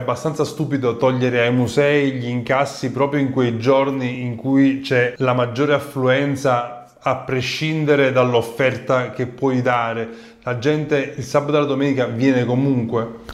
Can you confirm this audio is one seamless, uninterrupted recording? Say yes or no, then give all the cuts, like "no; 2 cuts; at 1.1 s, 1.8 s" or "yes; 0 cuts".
yes; 0 cuts